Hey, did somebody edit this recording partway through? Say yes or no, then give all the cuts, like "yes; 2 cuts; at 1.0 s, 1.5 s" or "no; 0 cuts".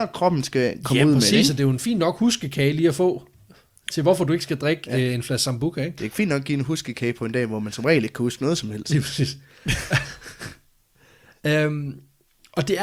no; 0 cuts